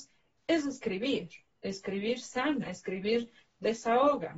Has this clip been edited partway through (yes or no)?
no